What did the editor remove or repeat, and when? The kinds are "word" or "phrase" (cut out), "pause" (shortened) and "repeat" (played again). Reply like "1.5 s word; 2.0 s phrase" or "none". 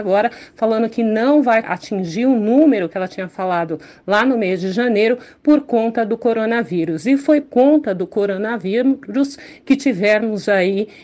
1.6 s word; 7.4 s word